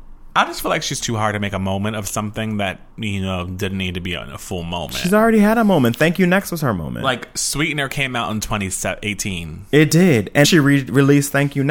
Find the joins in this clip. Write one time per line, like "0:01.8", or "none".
0:01.0
0:02.9
0:10.4